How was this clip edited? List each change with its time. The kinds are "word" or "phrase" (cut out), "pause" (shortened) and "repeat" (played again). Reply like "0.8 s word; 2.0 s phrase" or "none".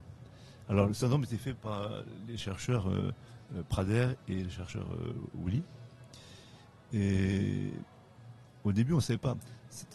none